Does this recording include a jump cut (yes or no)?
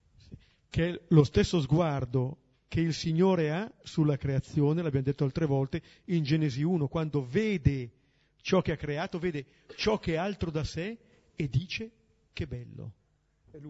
no